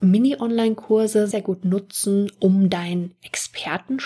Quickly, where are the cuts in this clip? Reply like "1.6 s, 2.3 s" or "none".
1.3 s